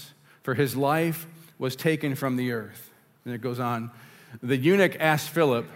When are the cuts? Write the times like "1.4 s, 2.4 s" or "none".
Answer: none